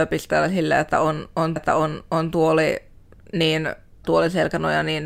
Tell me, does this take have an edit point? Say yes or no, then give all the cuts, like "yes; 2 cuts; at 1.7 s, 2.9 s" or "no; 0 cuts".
yes; 2 cuts; at 1.6 s, 4.0 s